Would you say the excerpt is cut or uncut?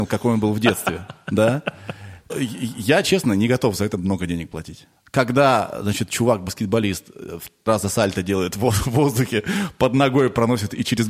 cut